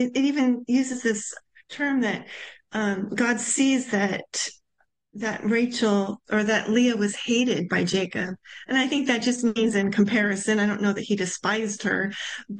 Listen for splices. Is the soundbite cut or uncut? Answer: uncut